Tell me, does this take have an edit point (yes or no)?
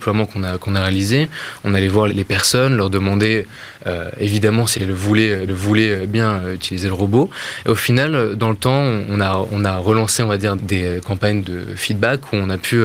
yes